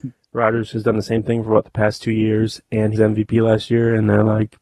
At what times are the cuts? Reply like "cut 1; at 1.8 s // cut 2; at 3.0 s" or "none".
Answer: cut 1; at 2.9 s

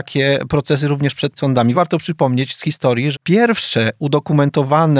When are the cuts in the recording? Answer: cut 1; at 1.4 s // cut 2; at 1.7 s // cut 3; at 3.1 s

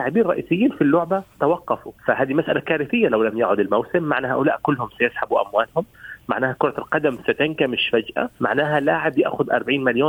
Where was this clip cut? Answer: cut 1; at 2.0 s // cut 2; at 8.3 s

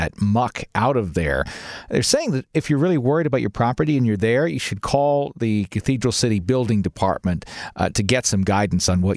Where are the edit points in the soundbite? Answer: none

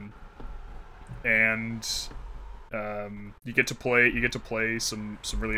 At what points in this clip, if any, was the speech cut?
cut 1; at 2.7 s // cut 2; at 3.4 s

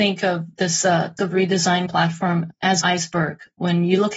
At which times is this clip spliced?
cut 1; at 1.2 s // cut 2; at 1.9 s // cut 3; at 2.8 s

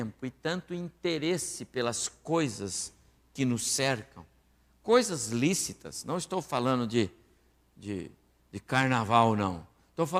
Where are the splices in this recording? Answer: none

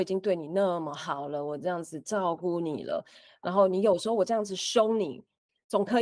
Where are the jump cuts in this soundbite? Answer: none

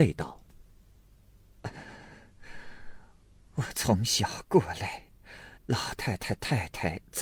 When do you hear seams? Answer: cut 1; at 5.6 s

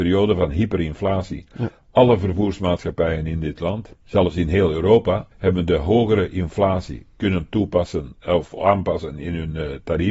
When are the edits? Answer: cut 1; at 4.0 s // cut 2; at 5.3 s

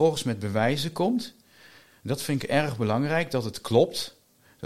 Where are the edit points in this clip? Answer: none

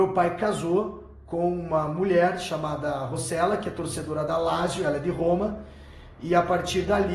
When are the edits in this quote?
none

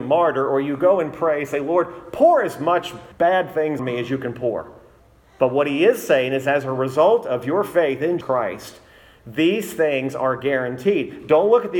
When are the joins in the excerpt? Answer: cut 1; at 3.1 s // cut 2; at 3.8 s // cut 3; at 5.0 s // cut 4; at 8.2 s

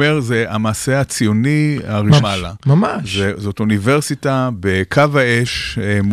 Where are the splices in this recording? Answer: cut 1; at 2.2 s

